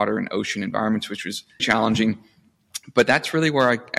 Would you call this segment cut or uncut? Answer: cut